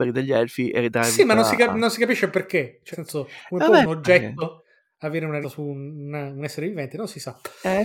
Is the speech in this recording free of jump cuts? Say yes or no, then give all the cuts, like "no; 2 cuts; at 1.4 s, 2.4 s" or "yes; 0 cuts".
no; 2 cuts; at 2.9 s, 5.4 s